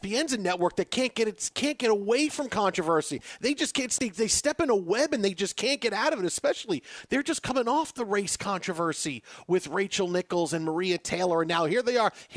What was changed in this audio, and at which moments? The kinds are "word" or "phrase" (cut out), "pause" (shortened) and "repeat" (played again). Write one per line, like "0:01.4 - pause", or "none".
0:04.0 - word